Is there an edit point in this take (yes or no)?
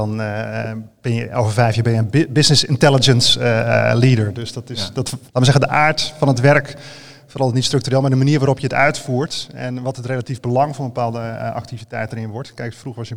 yes